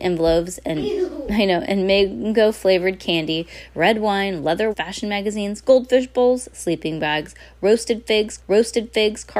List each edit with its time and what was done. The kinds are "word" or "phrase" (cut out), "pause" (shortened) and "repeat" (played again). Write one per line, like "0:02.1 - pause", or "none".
0:04.7 - word
0:08.4 - repeat